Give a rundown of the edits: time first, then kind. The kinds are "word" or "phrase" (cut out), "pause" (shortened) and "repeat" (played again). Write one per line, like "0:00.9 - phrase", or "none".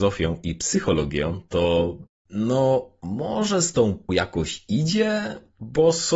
0:04.1 - phrase